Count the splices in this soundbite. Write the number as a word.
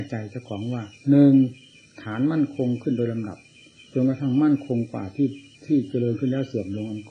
two